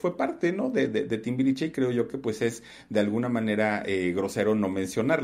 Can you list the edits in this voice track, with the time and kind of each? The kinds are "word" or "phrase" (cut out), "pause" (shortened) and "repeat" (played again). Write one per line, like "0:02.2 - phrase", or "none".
none

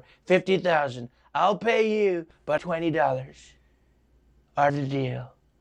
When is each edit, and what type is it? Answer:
0:02.6 - word
0:04.7 - word

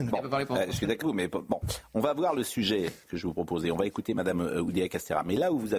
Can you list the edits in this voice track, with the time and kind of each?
0:01.0 - word
0:03.0 - word

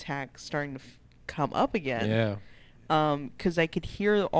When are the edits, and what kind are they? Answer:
none

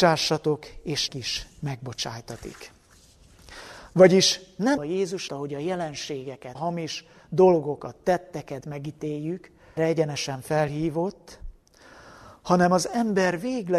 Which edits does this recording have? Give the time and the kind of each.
0:01.1 - word
0:04.8 - word
0:05.3 - phrase
0:06.5 - phrase
0:08.6 - word
0:09.8 - word

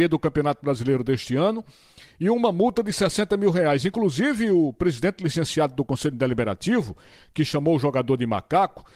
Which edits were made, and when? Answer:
none

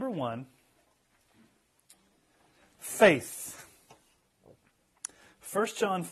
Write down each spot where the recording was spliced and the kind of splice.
none

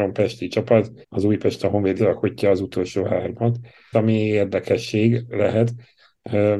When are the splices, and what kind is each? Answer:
0:01.0 - pause
0:02.0 - phrase
0:03.9 - word

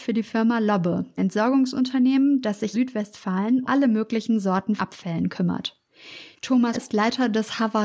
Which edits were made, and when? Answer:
0:01.2 - word
0:02.7 - word
0:03.6 - word
0:04.8 - word
0:06.7 - word

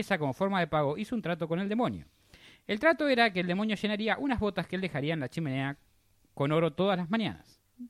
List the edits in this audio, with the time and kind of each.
none

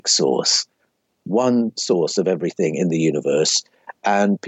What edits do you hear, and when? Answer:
none

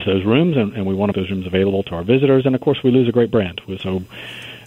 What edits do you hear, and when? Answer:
0:01.1 - word

